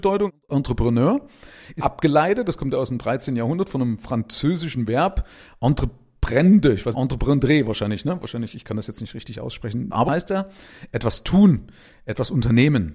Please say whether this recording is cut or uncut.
cut